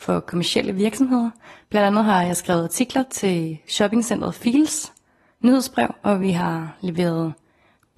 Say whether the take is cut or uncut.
uncut